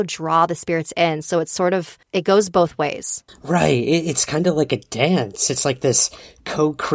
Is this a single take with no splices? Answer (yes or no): no